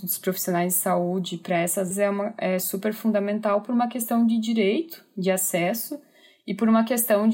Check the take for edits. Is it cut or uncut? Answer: cut